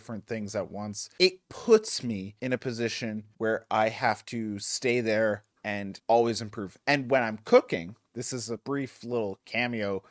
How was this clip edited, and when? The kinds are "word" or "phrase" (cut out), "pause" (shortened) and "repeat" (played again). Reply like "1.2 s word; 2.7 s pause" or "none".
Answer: 8.6 s pause